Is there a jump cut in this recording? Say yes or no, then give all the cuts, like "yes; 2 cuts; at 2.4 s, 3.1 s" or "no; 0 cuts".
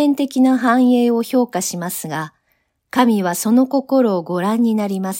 no; 0 cuts